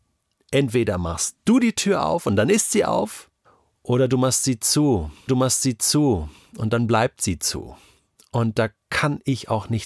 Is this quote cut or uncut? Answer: cut